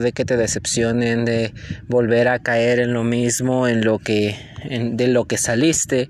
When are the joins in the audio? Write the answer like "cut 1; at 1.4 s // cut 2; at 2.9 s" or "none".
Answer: none